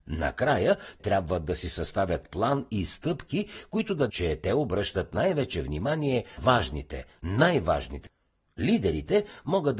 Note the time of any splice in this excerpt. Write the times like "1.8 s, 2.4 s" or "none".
1.0 s, 4.1 s, 6.4 s, 8.1 s